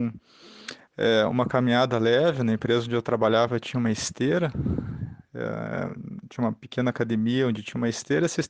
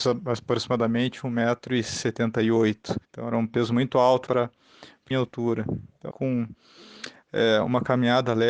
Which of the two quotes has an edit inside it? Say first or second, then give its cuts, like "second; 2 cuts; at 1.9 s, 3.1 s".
second; 4 cuts; at 3.0 s, 4.3 s, 5.1 s, 6.1 s